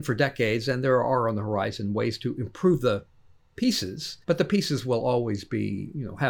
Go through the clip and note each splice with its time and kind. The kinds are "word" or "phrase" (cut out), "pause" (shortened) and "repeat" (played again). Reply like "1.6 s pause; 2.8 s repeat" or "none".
4.2 s pause